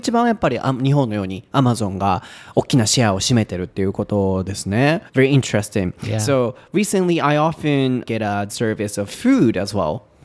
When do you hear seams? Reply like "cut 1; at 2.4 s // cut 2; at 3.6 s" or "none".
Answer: cut 1; at 5.1 s // cut 2; at 8.0 s // cut 3; at 8.5 s